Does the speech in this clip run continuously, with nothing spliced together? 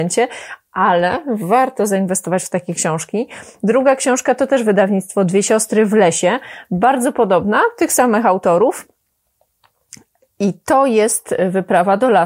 yes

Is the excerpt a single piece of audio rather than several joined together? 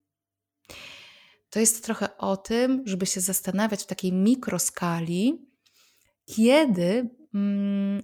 yes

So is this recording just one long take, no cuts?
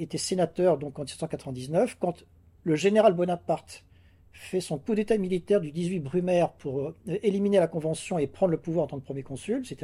yes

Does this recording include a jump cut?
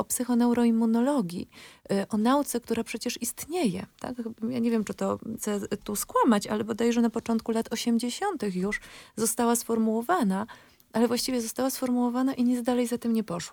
yes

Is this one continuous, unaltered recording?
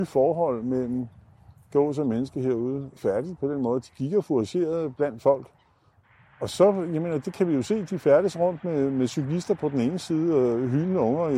yes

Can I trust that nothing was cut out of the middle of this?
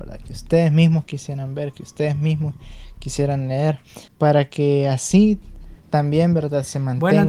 no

